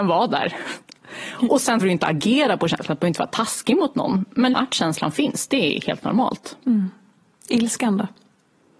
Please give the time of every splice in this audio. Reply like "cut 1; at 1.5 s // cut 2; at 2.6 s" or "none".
cut 1; at 1.8 s // cut 2; at 4.5 s